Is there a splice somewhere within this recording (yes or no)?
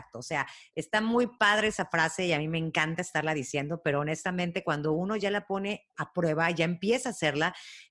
yes